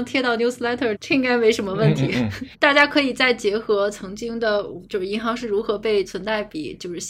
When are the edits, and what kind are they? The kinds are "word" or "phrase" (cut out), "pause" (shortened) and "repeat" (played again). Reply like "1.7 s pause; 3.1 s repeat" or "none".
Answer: 1.0 s word

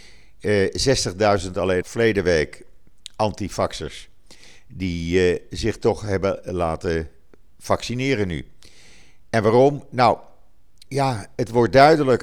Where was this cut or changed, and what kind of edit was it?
1.8 s word; 10.9 s word

